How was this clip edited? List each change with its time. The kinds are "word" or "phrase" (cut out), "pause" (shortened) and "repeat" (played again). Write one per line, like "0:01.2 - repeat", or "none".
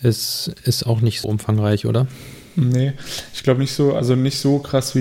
0:01.2 - word

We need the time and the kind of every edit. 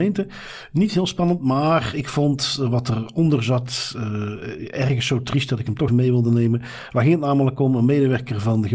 0:05.9 - word

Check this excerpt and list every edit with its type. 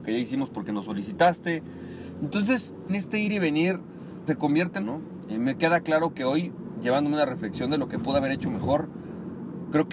0:02.9 - word
0:04.3 - word
0:04.8 - phrase

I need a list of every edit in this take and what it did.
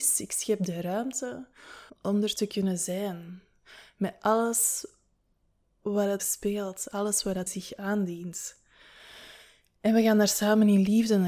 0:01.9 - phrase
0:06.2 - word
0:07.5 - word

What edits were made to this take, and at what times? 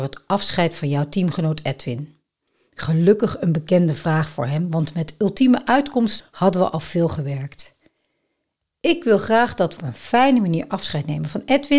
0:06.2 - word
0:09.8 - word

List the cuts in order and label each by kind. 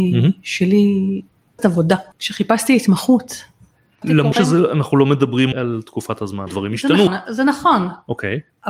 0:01.6 - word
0:04.0 - word
0:04.3 - word
0:05.5 - word
0:06.5 - word
0:07.1 - word

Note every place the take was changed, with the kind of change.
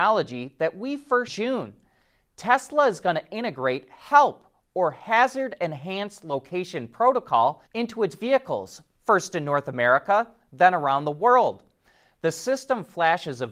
0:01.3 - phrase
0:07.7 - pause

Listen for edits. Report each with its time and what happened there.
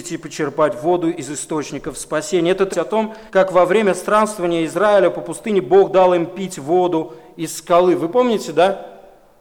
0:02.7 - phrase
0:03.3 - pause

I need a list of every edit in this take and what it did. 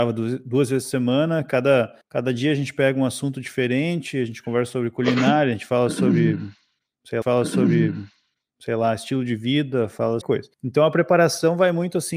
0:02.0 - pause
0:07.2 - repeat
0:10.2 - phrase
0:10.5 - pause

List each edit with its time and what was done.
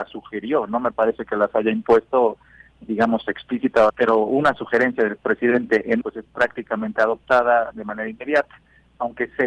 0:03.9 - word
0:06.0 - word

